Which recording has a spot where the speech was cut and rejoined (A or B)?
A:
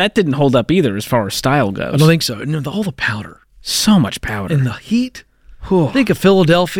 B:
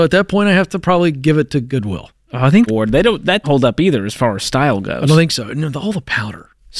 B